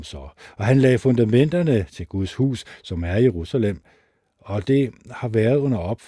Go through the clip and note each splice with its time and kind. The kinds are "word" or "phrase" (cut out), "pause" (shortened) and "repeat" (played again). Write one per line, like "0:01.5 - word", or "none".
none